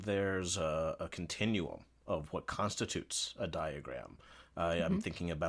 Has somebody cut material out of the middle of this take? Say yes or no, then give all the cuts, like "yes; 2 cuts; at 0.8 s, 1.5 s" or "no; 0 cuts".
no; 0 cuts